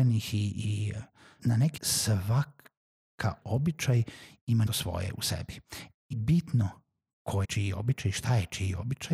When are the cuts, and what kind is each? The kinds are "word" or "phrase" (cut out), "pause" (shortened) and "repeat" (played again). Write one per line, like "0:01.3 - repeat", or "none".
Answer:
0:01.4 - word
0:01.8 - word
0:03.4 - word
0:04.7 - word
0:06.1 - word
0:07.4 - word